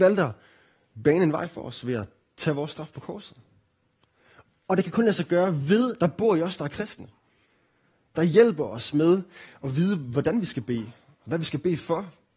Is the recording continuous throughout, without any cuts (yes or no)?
no